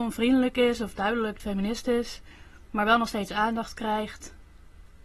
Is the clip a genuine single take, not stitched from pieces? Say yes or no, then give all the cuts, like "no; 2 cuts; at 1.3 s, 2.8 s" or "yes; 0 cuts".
no; 1 cut; at 1.4 s